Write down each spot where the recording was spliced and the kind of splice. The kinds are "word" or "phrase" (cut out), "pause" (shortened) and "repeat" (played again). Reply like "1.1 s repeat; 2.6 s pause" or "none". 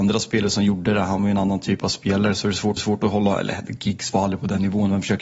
2.8 s repeat